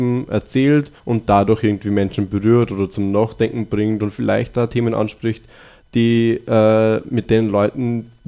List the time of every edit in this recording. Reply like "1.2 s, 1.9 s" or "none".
1.0 s